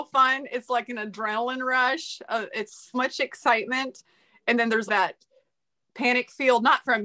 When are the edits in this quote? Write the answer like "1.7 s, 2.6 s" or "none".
2.9 s, 4.9 s